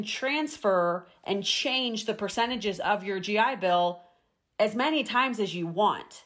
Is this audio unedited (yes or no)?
yes